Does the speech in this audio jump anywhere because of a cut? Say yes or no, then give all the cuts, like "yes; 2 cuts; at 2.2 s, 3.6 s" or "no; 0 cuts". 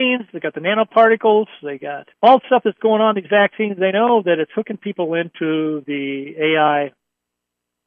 yes; 1 cut; at 2.1 s